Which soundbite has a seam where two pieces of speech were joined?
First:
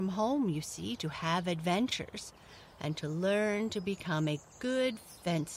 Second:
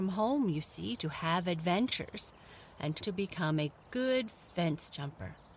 second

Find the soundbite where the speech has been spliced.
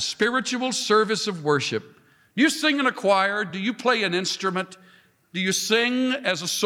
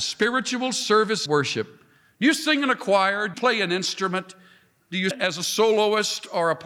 second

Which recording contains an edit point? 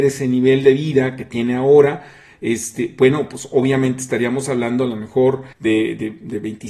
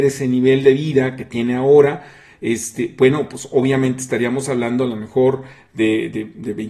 first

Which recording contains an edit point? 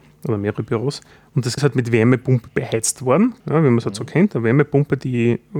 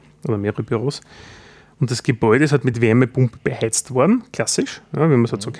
first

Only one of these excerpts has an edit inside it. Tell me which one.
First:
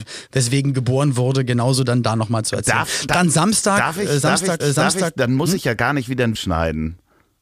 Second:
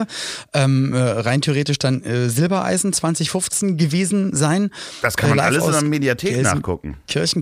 first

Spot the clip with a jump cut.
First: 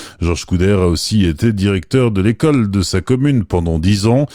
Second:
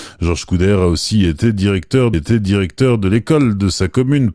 second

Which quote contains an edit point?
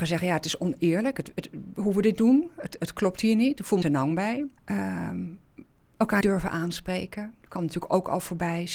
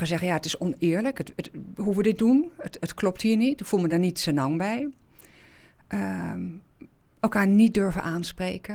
first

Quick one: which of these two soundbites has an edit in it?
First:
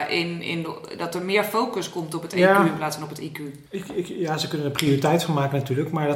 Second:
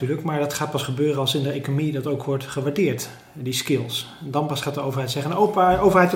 first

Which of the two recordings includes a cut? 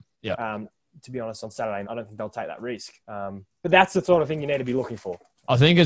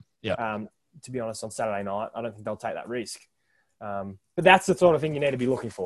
first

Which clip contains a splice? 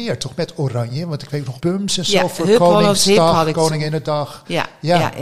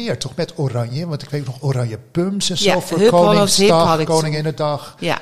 first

